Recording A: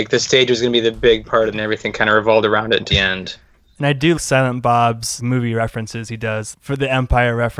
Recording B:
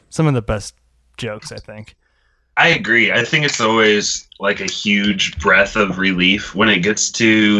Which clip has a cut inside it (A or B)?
A